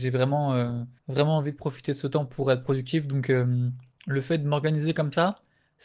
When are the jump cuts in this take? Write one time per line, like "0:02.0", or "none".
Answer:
0:01.0